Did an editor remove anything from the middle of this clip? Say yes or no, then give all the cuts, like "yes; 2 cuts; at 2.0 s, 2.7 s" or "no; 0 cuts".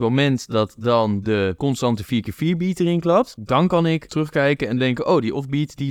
no; 0 cuts